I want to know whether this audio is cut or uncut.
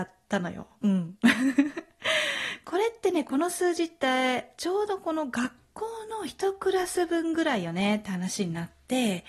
uncut